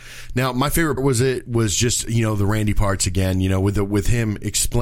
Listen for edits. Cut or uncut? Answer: cut